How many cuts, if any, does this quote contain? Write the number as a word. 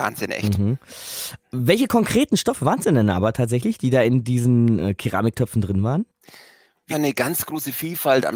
one